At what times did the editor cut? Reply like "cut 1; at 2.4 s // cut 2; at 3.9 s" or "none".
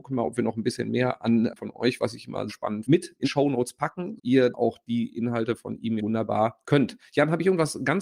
cut 1; at 1.6 s // cut 2; at 2.5 s // cut 3; at 2.8 s // cut 4; at 3.2 s // cut 5; at 4.2 s // cut 6; at 4.5 s // cut 7; at 6.0 s // cut 8; at 6.6 s

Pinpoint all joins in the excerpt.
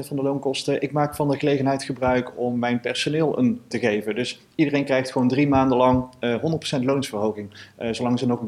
cut 1; at 3.7 s

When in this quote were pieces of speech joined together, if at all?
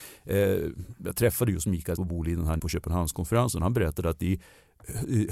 cut 1; at 2.0 s // cut 2; at 2.6 s

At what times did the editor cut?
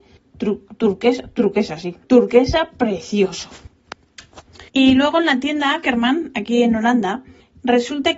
cut 1; at 2.0 s // cut 2; at 4.7 s

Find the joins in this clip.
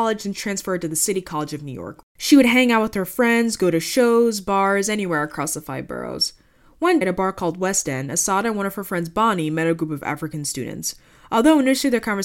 cut 1; at 7.0 s

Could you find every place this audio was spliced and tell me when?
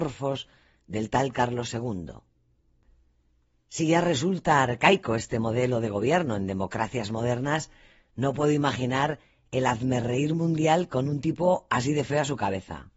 none

